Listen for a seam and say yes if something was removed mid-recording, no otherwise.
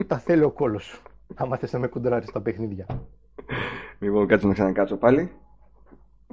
no